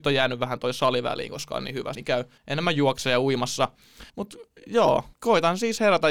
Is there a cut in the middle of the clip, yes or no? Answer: yes